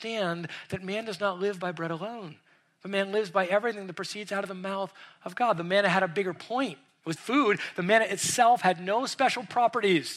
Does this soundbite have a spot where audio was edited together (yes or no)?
yes